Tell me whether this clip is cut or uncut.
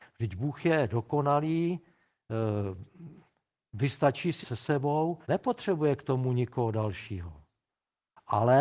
cut